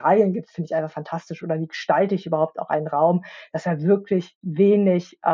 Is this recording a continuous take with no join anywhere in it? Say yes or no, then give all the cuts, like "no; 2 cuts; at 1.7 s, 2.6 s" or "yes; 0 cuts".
yes; 0 cuts